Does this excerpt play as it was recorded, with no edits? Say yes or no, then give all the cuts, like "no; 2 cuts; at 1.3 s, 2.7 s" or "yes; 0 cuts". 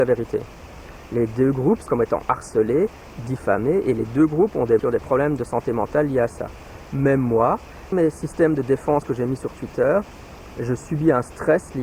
no; 3 cuts; at 1.9 s, 4.8 s, 7.9 s